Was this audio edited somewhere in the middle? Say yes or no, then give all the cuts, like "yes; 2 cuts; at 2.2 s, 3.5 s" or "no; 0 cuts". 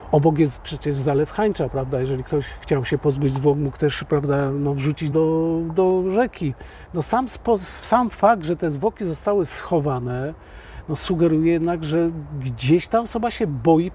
yes; 1 cut; at 5.1 s